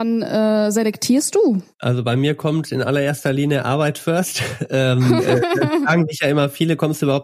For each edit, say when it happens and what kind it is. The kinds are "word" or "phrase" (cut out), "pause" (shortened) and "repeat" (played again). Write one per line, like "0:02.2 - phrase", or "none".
0:01.7 - pause

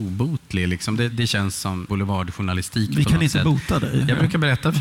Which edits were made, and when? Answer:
0:01.1 - word
0:01.9 - phrase

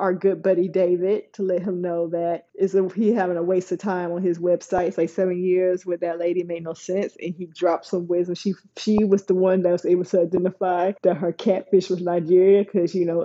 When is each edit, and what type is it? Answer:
0:02.5 - pause
0:11.0 - pause

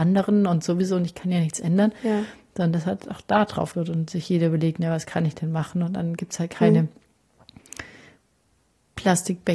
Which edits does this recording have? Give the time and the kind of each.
0:03.7 - word

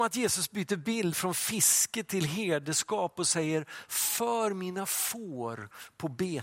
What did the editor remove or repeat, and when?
none

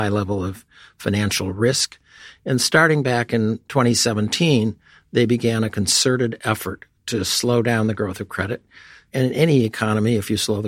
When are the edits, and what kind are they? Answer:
none

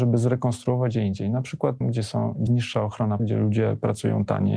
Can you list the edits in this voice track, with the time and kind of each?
0:00.9 - word
0:01.8 - word
0:02.5 - word
0:03.2 - word

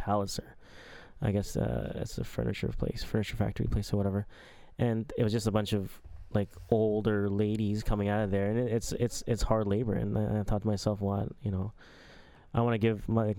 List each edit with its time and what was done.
none

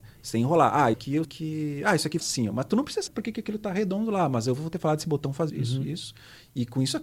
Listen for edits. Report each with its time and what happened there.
0:00.9 - word
0:01.2 - word
0:02.2 - word
0:03.1 - word
0:05.5 - word

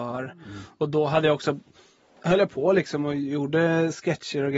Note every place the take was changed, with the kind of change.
none

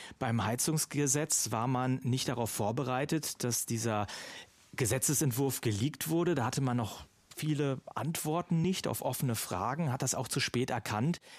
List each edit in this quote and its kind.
none

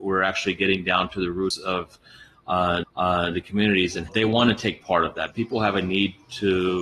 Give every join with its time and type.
0:02.8 - repeat
0:04.1 - phrase
0:05.3 - phrase

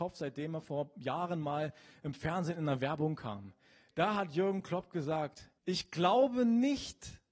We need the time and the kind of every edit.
0:05.6 - pause

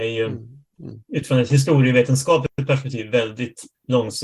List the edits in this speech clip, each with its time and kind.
none

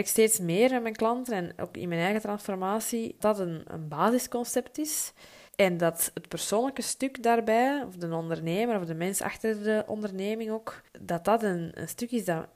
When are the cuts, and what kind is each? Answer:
0:03.2 - word
0:03.7 - word
0:05.5 - pause
0:10.9 - pause

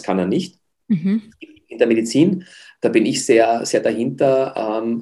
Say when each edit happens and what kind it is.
none

